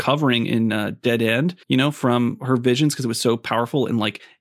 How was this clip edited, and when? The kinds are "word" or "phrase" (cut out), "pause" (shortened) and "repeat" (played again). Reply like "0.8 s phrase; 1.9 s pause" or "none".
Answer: 1.6 s pause